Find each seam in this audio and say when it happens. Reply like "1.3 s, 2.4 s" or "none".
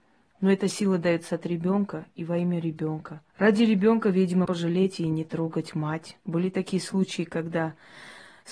3.3 s, 4.4 s, 6.2 s